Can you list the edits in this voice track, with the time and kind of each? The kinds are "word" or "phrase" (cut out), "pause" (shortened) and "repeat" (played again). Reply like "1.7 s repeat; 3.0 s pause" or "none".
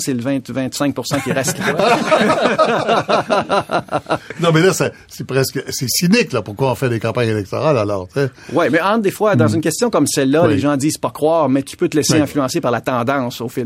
none